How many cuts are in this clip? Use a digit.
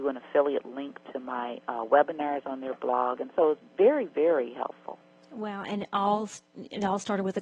0